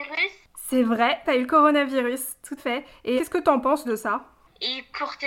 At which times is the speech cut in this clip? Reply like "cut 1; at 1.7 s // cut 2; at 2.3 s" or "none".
cut 1; at 1.2 s // cut 2; at 2.6 s // cut 3; at 3.2 s // cut 4; at 3.8 s